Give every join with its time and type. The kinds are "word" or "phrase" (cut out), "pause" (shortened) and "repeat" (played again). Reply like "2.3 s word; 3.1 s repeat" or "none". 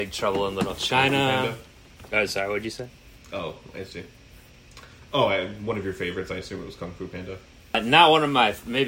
none